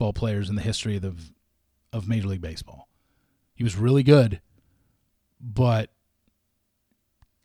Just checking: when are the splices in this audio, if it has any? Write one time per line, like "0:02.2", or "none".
none